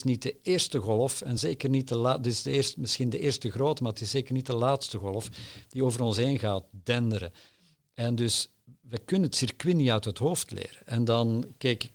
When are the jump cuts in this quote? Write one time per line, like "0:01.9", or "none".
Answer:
none

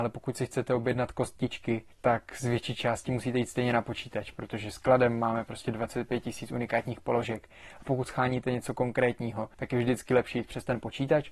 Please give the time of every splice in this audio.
0:01.9
0:09.5

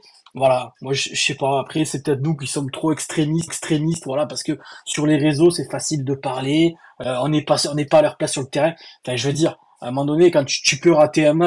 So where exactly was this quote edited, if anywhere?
0:03.5

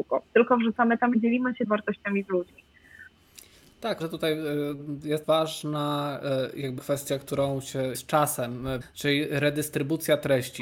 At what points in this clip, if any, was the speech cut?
0:01.1
0:01.7
0:04.0
0:05.2
0:06.8
0:07.9
0:08.8

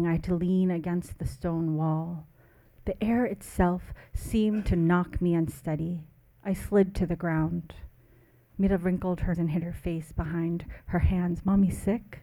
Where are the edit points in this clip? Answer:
0:09.3

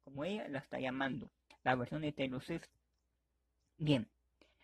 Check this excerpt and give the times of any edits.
0:01.5

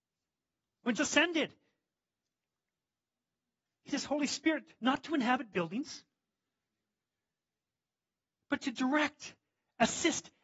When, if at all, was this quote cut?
0:01.0
0:03.9

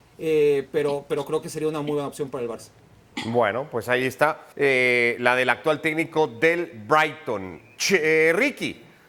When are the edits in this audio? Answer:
0:04.5

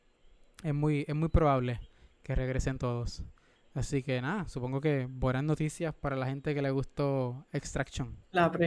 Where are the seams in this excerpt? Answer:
none

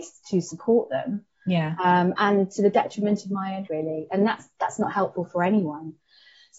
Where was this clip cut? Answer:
0:03.7

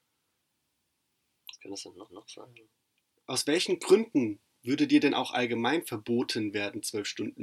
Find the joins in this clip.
0:02.1

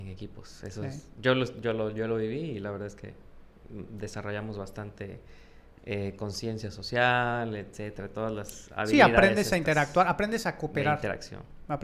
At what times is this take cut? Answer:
none

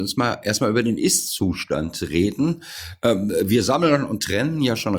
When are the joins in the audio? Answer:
none

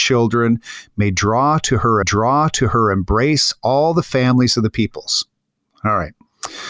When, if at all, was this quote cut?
0:02.0

